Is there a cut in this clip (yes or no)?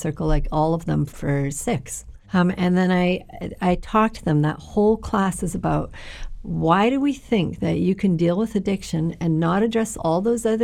yes